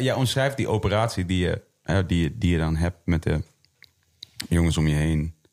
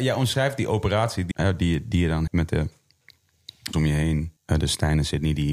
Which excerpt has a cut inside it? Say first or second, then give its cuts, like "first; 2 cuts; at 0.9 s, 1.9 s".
second; 4 cuts; at 1.3 s, 2.3 s, 3.7 s, 4.4 s